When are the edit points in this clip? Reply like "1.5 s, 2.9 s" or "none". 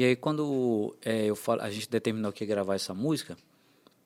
none